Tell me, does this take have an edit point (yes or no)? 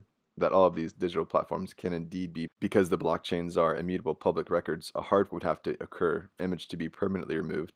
yes